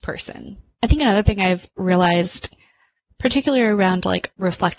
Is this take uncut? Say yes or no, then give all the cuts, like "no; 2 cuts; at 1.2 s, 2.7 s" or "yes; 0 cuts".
yes; 0 cuts